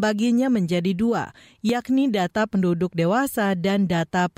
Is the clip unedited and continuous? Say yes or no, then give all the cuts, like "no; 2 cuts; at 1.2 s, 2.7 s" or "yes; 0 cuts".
yes; 0 cuts